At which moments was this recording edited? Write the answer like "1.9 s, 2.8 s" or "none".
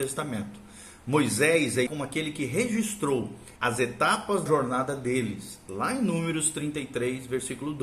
1.9 s, 3.6 s, 4.5 s